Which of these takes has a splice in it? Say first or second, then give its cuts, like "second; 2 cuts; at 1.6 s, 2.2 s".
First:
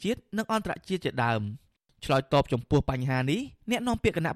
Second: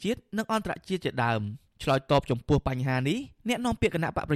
second; 1 cut; at 1.7 s